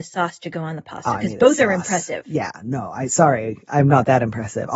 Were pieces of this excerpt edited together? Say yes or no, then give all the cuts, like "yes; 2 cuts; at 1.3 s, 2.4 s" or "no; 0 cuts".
no; 0 cuts